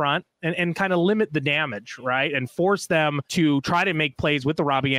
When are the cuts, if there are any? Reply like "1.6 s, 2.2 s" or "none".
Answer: 3.2 s